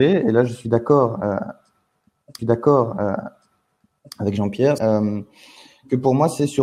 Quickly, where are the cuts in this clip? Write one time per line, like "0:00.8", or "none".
0:02.4
0:04.8